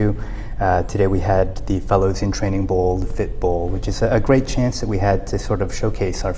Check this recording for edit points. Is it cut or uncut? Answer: uncut